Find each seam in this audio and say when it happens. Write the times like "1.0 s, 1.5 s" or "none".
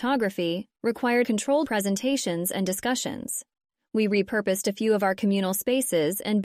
1.2 s, 1.6 s